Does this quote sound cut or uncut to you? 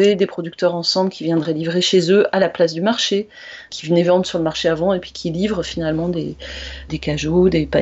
cut